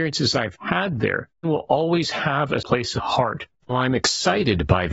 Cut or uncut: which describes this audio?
cut